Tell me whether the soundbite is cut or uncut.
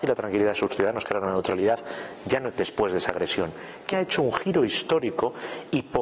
cut